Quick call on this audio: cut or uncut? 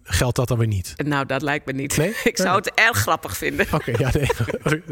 uncut